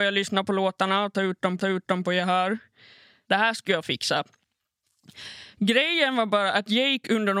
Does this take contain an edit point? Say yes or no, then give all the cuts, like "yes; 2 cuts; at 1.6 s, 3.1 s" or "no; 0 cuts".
yes; 1 cut; at 1.6 s